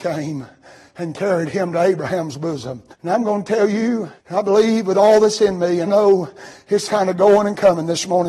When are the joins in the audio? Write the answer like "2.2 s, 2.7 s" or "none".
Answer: 2.9 s, 4.2 s, 5.9 s, 6.9 s